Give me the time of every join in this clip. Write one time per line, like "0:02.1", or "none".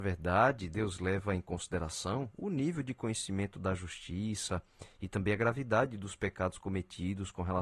none